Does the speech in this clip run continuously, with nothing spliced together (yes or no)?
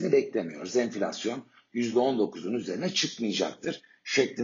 yes